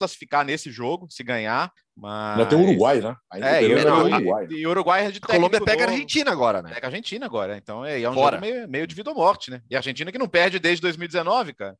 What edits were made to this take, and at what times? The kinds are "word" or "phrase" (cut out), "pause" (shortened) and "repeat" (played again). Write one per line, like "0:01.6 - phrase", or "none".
0:01.8 - pause